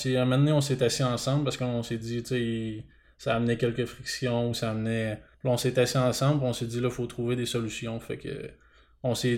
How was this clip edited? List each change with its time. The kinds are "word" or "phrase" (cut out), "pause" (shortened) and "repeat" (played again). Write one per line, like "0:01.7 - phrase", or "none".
none